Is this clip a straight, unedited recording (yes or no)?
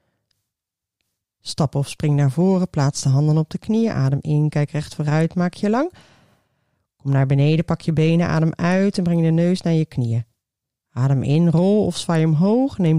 yes